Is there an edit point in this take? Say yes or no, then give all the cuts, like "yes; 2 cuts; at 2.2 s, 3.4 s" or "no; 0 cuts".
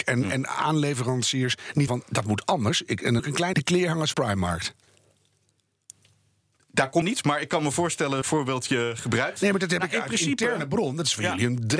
yes; 6 cuts; at 1.9 s, 3.2 s, 3.5 s, 4.1 s, 7.0 s, 8.2 s